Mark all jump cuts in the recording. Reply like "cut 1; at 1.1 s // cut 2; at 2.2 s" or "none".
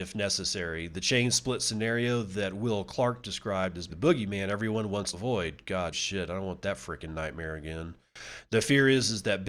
cut 1; at 3.9 s // cut 2; at 5.1 s // cut 3; at 5.9 s